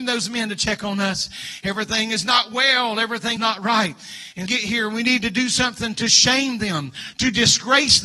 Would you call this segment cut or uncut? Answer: cut